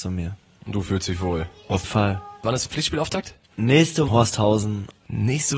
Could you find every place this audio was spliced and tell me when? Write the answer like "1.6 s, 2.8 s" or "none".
1.8 s, 4.1 s

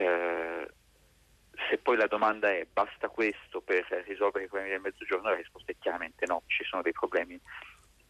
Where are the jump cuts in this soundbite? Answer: 6.5 s

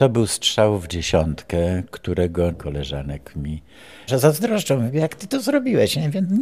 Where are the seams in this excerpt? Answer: 2.5 s, 4.1 s

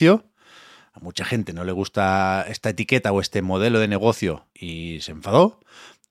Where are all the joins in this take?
4.5 s

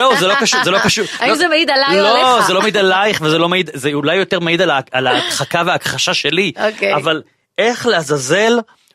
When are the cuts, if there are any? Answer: none

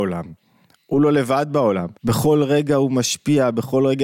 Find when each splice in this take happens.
2.0 s

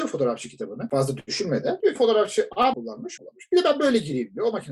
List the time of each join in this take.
2.0 s, 2.7 s, 3.2 s

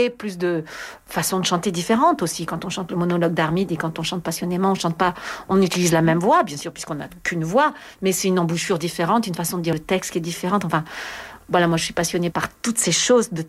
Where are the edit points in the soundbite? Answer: none

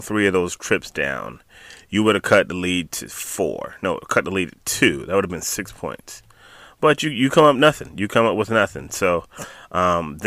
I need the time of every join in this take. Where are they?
none

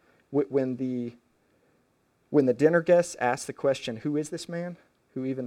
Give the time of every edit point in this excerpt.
none

